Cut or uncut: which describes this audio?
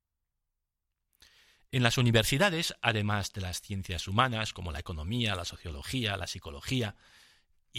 uncut